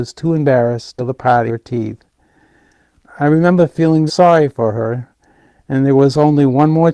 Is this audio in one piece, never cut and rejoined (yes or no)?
no